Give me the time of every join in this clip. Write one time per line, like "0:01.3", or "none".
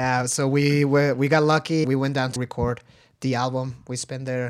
0:01.8
0:02.4